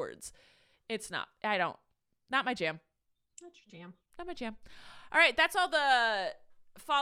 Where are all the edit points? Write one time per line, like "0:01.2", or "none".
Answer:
none